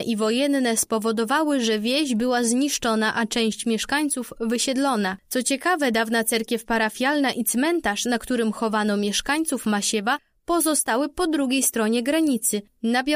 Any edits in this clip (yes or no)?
no